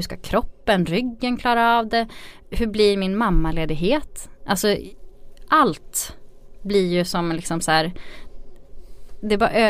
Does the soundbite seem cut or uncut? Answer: uncut